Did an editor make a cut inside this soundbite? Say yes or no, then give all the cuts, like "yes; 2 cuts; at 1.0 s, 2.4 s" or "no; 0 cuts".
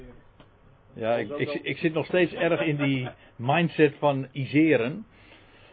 no; 0 cuts